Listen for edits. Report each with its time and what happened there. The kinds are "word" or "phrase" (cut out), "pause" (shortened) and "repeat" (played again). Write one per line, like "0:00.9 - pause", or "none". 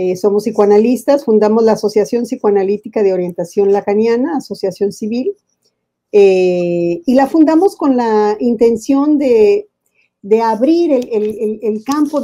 none